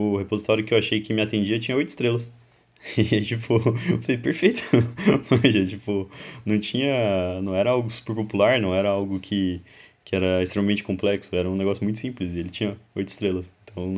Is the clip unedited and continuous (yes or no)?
yes